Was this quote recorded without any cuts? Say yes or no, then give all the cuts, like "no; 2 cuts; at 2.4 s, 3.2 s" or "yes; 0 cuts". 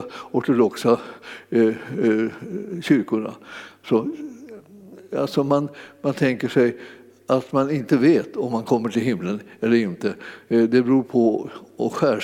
yes; 0 cuts